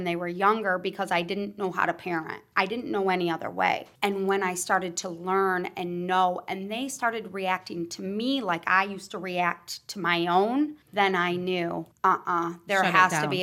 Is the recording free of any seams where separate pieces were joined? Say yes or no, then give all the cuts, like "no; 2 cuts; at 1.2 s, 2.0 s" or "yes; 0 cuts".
no; 3 cuts; at 4.0 s, 10.8 s, 11.9 s